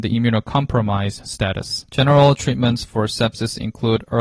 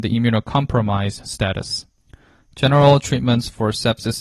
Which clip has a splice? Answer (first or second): first